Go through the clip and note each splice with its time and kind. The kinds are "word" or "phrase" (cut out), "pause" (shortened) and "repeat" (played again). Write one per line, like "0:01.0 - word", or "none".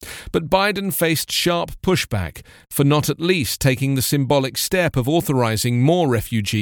none